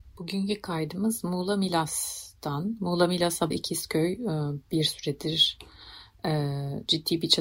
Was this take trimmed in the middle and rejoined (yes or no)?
yes